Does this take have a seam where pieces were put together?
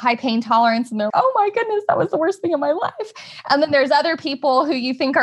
yes; 1 cut; at 1.1 s

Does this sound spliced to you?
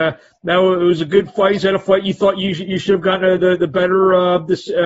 no; 0 cuts

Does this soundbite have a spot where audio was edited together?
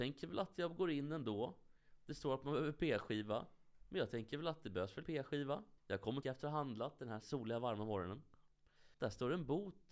yes; 5 cuts; at 5.0 s, 5.8 s, 6.2 s, 7.2 s, 8.9 s

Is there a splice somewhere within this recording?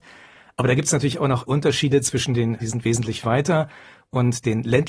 yes; 2 cuts; at 1.5 s, 2.6 s

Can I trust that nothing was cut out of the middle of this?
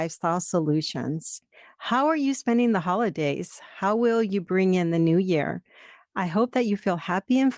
yes; 0 cuts

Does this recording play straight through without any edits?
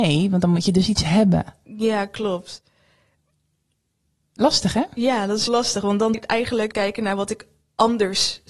no; 3 cuts; at 5.5 s, 6.1 s, 6.7 s

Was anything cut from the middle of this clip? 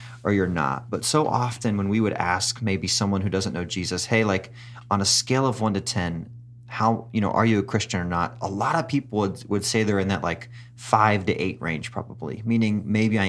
no; 0 cuts

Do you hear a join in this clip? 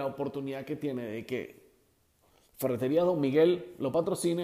no; 0 cuts

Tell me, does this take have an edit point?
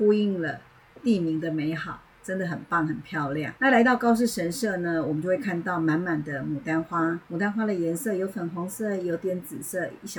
yes; 3 cuts; at 2.1 s, 3.6 s, 7.3 s

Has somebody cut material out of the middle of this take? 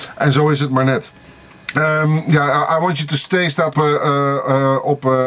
yes; 1 cut; at 3.7 s

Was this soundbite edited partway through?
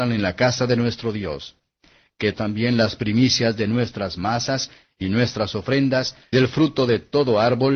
yes; 2 cuts; at 2.3 s, 6.3 s

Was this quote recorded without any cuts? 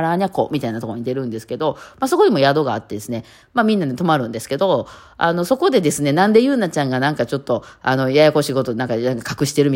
yes; 0 cuts

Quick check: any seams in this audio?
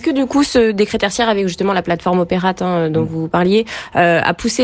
no; 0 cuts

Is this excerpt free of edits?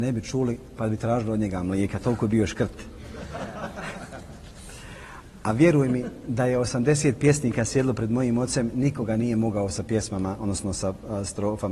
yes; 0 cuts

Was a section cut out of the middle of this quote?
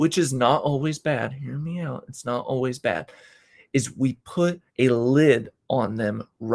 yes; 1 cut; at 4.7 s

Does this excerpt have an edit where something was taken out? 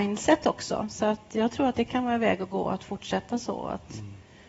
no; 0 cuts

